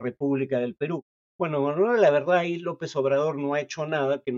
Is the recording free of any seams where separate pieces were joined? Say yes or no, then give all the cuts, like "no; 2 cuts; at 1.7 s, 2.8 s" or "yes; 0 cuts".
no; 1 cut; at 1.1 s